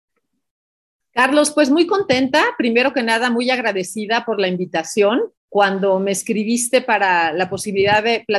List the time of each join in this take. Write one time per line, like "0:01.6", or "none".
0:05.4